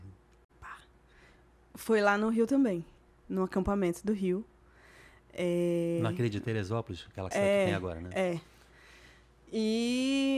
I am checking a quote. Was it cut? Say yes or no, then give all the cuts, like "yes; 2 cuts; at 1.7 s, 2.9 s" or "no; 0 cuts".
yes; 1 cut; at 7.3 s